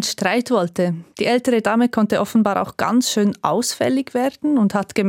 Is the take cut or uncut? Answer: cut